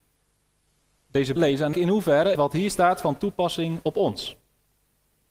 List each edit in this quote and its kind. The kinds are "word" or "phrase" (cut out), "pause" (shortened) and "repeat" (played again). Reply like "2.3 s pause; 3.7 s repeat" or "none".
1.4 s word; 1.7 s word; 2.3 s word